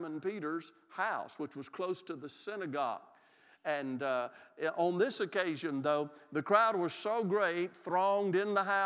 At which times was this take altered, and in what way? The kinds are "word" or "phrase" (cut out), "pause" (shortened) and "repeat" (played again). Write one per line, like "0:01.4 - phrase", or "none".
none

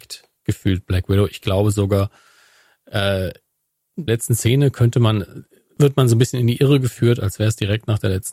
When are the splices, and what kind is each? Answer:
0:04.1 - phrase

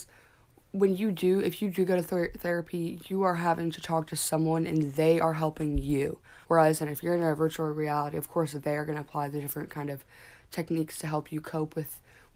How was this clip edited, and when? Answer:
0:06.4 - pause

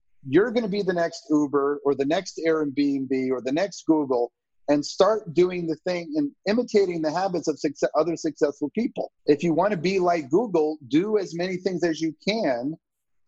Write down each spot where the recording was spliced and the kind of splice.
0:09.2 - pause

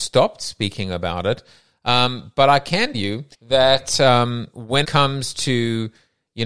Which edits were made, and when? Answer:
0:02.9 - word
0:03.3 - pause
0:04.8 - word

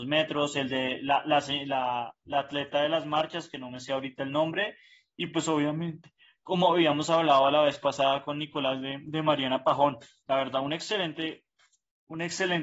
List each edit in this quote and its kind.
none

